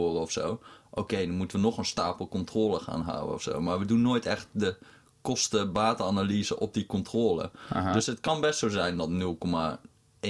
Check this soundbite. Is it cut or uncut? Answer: uncut